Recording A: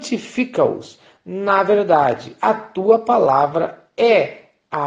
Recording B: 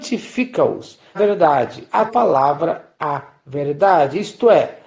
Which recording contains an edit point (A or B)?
B